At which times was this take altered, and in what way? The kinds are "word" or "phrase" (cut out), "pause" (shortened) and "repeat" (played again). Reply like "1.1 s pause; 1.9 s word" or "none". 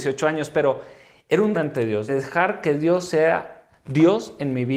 1.5 s phrase; 2.1 s word